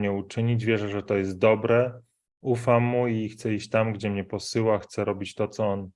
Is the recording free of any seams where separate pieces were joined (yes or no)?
yes